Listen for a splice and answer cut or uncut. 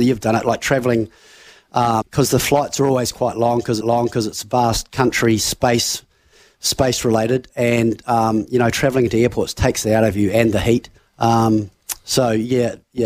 cut